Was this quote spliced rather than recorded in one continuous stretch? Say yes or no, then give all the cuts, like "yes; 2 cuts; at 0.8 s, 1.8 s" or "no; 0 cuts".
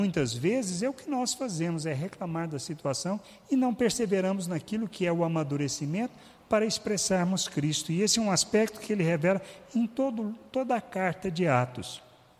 no; 0 cuts